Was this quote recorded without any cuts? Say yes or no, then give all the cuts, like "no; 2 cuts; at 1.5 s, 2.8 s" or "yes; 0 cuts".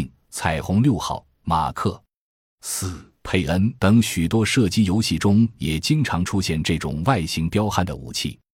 no; 2 cuts; at 3.2 s, 3.8 s